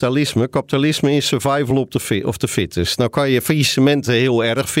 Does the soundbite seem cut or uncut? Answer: uncut